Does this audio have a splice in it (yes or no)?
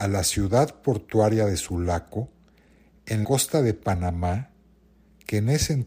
yes